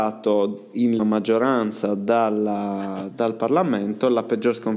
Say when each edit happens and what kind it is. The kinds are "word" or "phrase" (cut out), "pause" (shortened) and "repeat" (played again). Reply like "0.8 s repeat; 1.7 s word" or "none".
1.0 s word